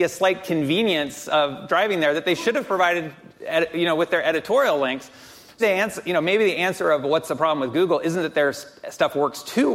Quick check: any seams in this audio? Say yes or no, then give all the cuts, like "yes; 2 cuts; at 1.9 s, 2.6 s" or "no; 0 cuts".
yes; 1 cut; at 5.6 s